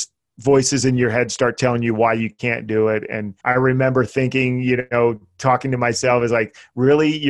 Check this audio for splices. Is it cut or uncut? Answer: cut